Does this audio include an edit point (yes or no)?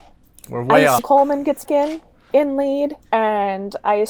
yes